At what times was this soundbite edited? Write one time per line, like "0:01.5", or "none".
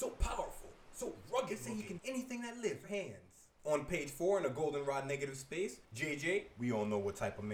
0:02.0
0:02.8
0:05.8